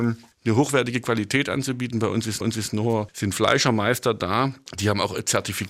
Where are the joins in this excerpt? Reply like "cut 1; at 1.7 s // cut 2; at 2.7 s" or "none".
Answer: cut 1; at 2.4 s